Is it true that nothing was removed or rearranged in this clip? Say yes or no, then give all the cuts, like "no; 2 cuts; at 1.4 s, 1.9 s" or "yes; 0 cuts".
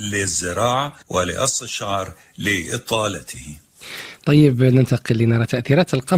no; 1 cut; at 1.0 s